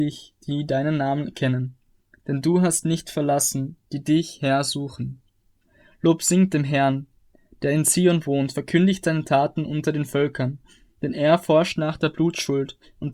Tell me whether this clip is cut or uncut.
uncut